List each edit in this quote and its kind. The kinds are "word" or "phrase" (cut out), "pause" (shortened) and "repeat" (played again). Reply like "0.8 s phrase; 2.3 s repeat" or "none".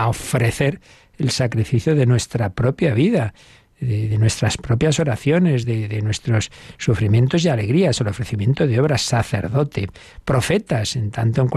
none